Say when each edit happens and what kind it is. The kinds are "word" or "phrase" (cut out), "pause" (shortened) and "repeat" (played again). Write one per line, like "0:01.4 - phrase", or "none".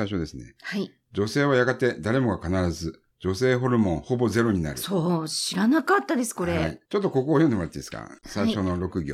0:03.1 - pause
0:06.9 - pause